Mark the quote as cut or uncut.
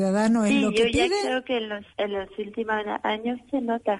cut